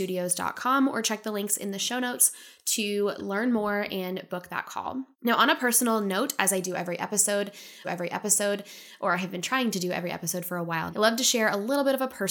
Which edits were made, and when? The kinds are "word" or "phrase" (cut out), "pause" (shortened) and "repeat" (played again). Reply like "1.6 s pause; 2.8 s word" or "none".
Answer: 5.1 s pause; 7.8 s repeat; 10.9 s word